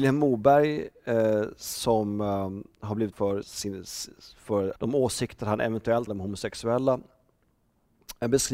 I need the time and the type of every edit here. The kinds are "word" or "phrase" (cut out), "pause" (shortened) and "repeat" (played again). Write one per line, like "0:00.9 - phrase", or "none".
0:03.1 - word
0:03.4 - word
0:04.8 - word
0:06.1 - word